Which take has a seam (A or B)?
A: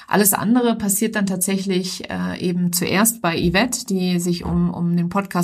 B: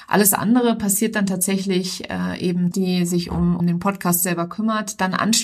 B